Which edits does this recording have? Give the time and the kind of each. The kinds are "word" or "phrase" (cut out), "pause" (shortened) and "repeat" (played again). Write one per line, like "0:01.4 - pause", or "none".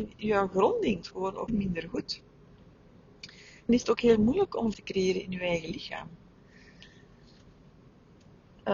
0:01.0 - word
0:01.5 - word
0:03.7 - word
0:04.7 - word